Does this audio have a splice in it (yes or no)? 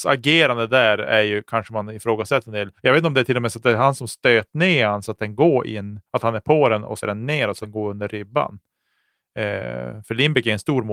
yes